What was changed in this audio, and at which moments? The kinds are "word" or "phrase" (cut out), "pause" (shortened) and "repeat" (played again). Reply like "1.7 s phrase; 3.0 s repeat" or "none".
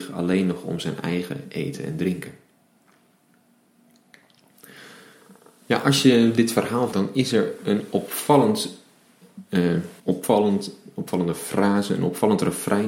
6.9 s phrase; 10.0 s pause